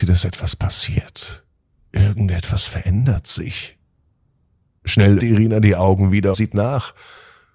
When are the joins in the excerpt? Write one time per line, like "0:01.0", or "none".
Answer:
0:05.2
0:06.3